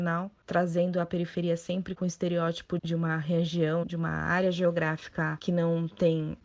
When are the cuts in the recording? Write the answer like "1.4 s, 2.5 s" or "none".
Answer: 3.8 s

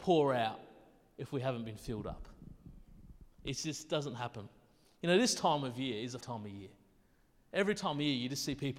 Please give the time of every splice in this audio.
3.3 s, 6.2 s

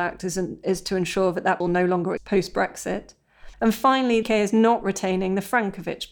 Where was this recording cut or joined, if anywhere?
1.6 s, 2.2 s, 3.5 s, 4.2 s

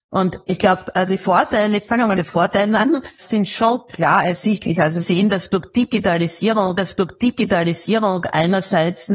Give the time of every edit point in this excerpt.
2.1 s, 3.2 s, 5.0 s, 6.8 s

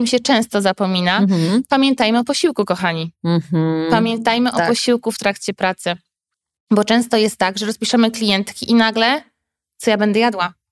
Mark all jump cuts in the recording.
none

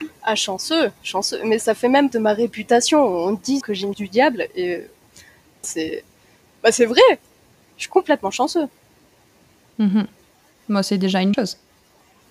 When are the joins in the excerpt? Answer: 1.6 s, 2.1 s, 3.6 s, 3.9 s, 5.6 s, 11.3 s

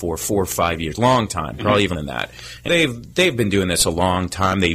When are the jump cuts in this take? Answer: 1.9 s, 2.7 s

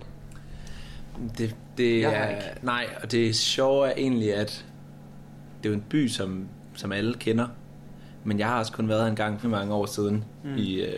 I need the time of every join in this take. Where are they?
9.4 s

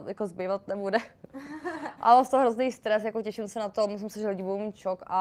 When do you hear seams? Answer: none

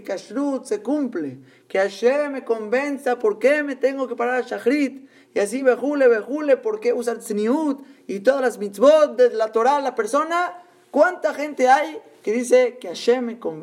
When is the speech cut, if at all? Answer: none

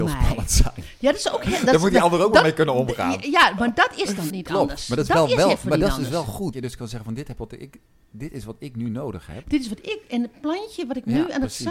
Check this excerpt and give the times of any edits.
4.3 s, 6.5 s

